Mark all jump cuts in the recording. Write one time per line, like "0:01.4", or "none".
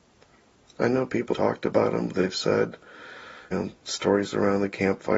0:01.3
0:03.5